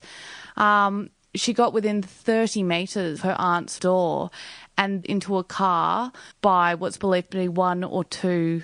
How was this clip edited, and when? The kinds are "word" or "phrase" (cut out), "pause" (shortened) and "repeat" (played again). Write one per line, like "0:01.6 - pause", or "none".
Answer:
0:03.2 - word
0:03.8 - word
0:05.0 - phrase
0:06.3 - pause